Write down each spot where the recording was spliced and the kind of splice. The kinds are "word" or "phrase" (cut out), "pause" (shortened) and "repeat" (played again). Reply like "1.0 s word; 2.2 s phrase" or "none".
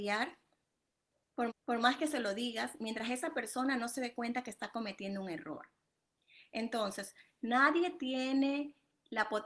1.5 s repeat